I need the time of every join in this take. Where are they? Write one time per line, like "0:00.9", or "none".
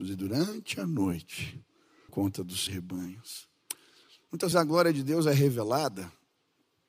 0:02.1
0:02.7
0:04.5